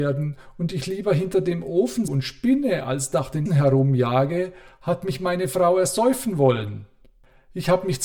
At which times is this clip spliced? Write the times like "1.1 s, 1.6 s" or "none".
2.1 s, 3.5 s